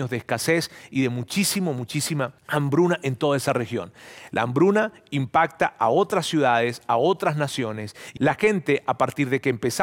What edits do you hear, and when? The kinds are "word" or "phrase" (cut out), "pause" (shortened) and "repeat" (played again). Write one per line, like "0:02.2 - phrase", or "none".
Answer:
0:02.4 - pause
0:08.2 - word